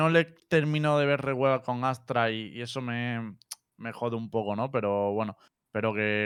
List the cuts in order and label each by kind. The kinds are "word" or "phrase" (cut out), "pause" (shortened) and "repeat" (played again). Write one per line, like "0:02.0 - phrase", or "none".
none